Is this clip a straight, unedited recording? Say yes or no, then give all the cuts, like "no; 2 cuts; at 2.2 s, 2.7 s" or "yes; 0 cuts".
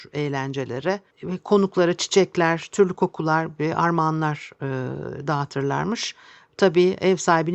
yes; 0 cuts